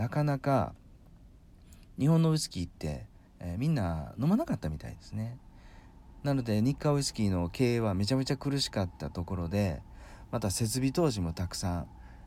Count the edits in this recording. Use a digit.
0